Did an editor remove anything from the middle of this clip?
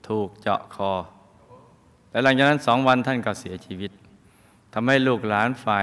no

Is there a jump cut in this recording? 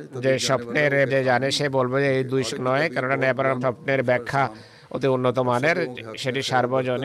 yes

